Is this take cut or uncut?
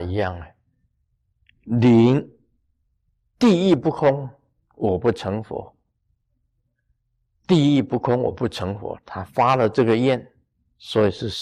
uncut